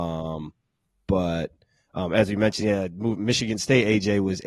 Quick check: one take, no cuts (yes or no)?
yes